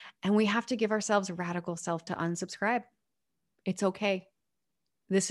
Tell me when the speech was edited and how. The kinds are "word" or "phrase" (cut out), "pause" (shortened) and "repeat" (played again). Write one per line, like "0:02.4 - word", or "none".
0:02.1 - word